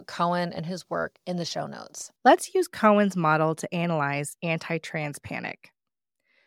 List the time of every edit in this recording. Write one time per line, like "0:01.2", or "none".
0:02.2

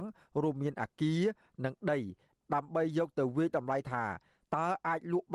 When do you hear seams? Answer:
none

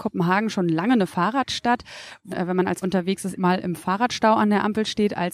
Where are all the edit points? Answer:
0:02.3
0:02.8
0:03.4

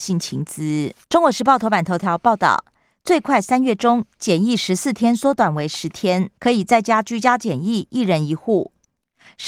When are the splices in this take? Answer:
0:01.0
0:06.4

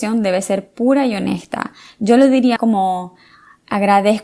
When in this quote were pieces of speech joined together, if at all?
0:02.6

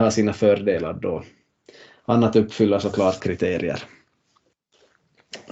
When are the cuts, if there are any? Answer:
0:03.2

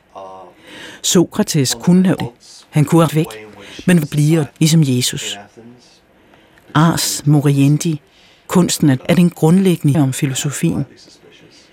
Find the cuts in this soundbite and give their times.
0:02.2
0:03.1
0:04.0
0:04.5
0:09.0
0:09.9

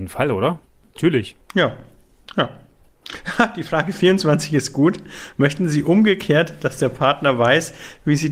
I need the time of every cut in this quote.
0:01.4

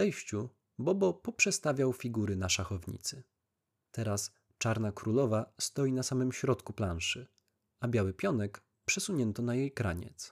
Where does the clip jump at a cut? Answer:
none

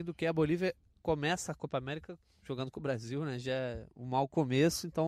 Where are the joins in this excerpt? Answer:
none

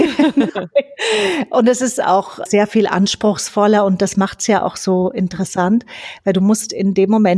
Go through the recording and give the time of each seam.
0:02.5

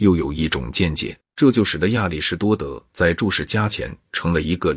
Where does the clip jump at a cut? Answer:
0:01.3

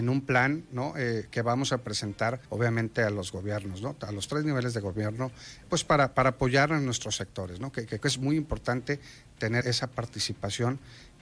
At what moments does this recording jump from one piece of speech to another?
0:02.5
0:05.6
0:08.0
0:09.6

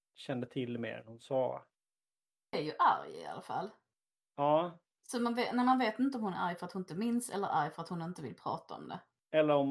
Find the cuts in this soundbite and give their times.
none

